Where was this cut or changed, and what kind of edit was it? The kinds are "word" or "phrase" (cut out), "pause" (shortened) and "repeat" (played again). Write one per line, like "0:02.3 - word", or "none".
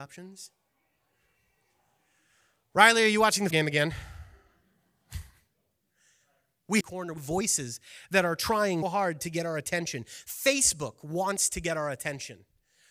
0:03.5 - word
0:06.8 - phrase
0:07.2 - word
0:08.8 - word